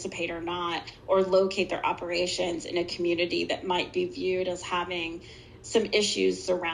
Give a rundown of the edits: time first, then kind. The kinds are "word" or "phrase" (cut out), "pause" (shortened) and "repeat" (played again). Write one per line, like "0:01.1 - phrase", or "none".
none